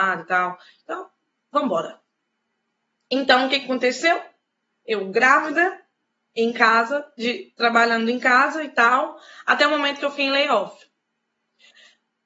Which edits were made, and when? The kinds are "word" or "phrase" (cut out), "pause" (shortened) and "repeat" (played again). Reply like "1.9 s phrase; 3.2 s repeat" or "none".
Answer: none